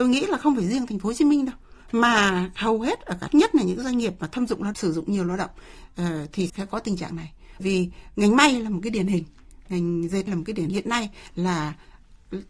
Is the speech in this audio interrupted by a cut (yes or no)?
yes